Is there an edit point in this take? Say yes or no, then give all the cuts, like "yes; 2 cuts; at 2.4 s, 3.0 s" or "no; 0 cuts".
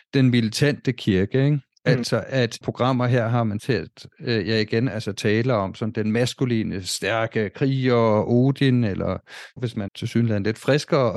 yes; 4 cuts; at 2.6 s, 3.6 s, 9.6 s, 9.9 s